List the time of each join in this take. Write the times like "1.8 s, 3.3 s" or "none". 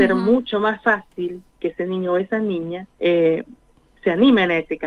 1.5 s, 2.9 s